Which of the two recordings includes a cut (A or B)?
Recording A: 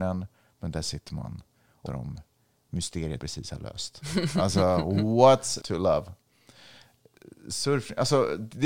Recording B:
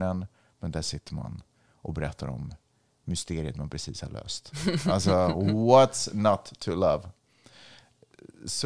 A